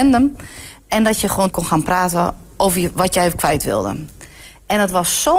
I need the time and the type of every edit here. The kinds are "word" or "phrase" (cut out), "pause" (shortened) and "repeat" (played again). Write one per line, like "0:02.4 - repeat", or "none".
0:01.5 - phrase